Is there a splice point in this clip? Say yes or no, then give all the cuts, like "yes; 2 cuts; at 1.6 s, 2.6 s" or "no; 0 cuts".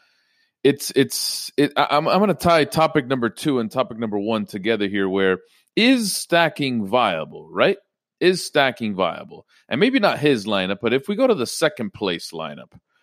no; 0 cuts